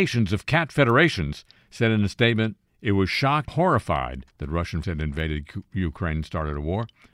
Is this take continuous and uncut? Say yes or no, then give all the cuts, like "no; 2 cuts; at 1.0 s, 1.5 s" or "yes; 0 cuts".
no; 5 cuts; at 1.6 s, 2.7 s, 3.5 s, 4.3 s, 4.8 s